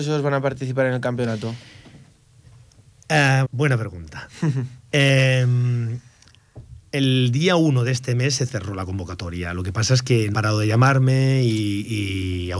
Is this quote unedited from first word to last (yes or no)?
no